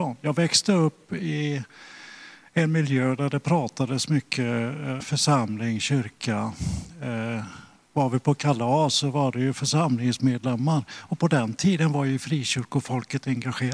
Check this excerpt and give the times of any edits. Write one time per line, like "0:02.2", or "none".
0:05.0